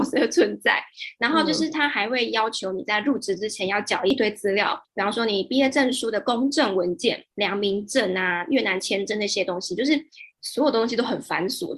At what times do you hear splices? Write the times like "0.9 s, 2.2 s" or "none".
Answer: 7.3 s, 10.3 s